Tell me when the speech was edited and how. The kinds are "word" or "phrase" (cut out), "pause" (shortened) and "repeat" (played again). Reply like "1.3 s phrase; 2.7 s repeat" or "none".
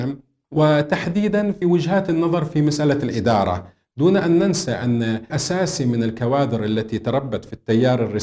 1.6 s word; 5.3 s word